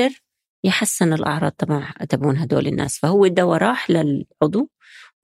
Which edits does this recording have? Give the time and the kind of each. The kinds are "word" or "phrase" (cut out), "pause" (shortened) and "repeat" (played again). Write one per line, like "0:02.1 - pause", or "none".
none